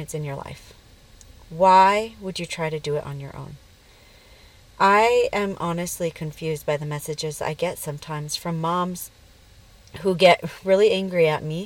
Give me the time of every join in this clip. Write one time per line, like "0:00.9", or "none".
none